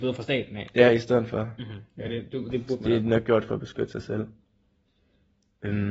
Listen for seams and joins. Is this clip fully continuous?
yes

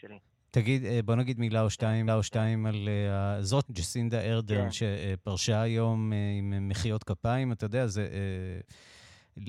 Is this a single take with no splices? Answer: no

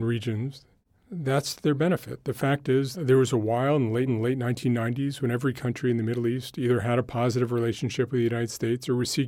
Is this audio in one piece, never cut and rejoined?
no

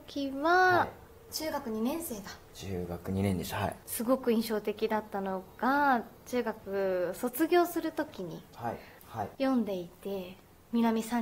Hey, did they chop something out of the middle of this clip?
yes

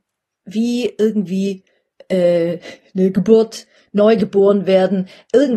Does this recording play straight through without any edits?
yes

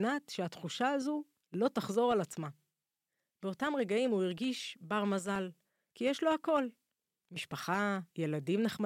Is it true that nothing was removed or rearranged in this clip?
yes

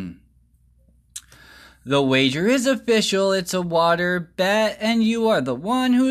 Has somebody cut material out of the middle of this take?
no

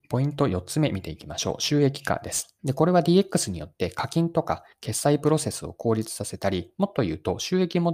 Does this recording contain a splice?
yes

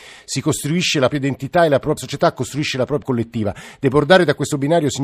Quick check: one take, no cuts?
no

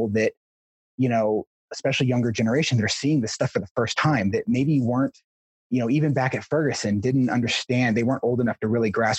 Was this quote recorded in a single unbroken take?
yes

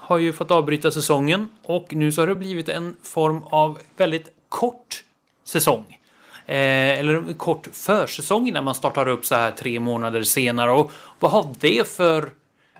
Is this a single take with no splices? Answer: yes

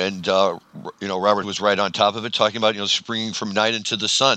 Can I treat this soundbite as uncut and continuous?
no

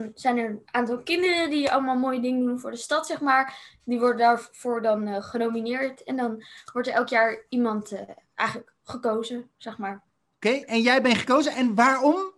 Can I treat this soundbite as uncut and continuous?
yes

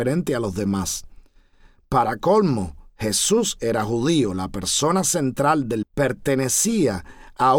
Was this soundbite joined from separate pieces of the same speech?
yes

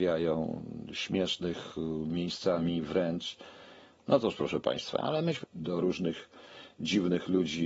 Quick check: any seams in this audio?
yes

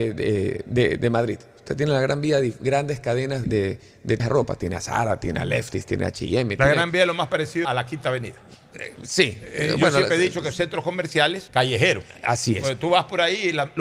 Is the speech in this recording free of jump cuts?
no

